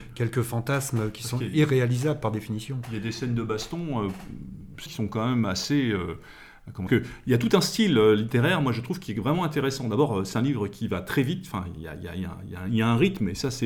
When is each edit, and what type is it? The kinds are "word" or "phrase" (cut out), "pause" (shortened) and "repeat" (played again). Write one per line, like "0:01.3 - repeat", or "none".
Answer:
0:04.9 - phrase
0:06.9 - phrase